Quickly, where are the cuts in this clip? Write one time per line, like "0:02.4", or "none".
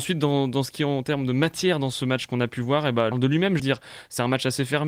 0:03.1
0:03.6